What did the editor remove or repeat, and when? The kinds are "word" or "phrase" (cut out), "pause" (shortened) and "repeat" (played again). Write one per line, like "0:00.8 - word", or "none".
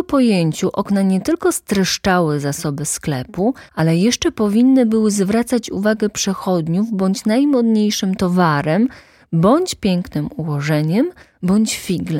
0:03.7 - pause